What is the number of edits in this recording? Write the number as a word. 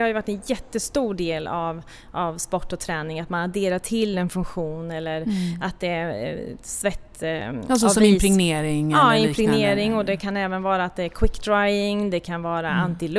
zero